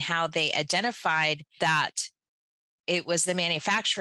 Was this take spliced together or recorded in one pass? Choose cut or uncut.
cut